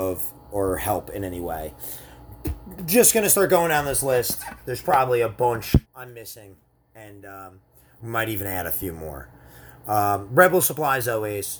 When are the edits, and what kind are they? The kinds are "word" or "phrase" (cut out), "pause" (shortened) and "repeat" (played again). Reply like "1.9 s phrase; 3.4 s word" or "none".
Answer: 5.8 s pause